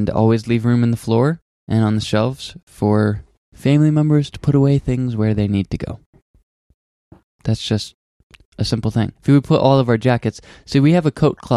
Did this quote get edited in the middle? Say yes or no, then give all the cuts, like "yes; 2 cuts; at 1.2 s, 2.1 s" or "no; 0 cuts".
yes; 1 cut; at 9.1 s